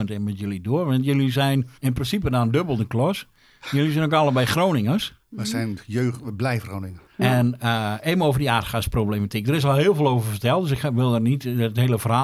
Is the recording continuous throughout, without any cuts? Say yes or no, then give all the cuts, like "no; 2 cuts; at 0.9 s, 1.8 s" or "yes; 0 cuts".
no; 2 cuts; at 1.8 s, 7.1 s